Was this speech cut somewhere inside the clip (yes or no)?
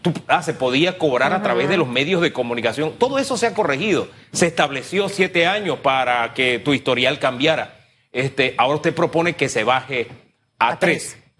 no